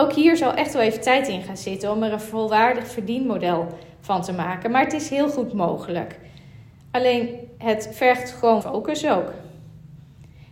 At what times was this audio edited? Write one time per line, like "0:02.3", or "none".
0:08.6